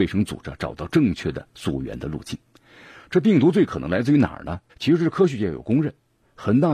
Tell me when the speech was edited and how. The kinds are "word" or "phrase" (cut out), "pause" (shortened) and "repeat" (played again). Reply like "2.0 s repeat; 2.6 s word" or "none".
1.5 s pause; 4.7 s pause